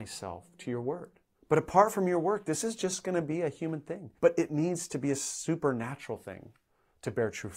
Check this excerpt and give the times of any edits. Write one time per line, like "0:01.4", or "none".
0:01.3
0:04.2